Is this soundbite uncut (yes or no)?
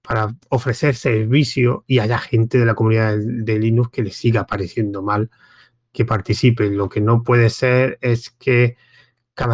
no